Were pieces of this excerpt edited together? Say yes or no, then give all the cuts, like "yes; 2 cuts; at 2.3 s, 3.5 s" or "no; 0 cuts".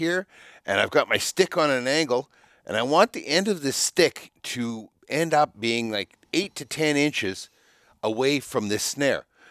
no; 0 cuts